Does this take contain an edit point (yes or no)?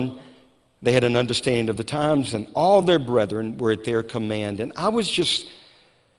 no